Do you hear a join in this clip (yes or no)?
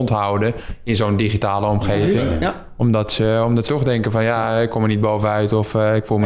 yes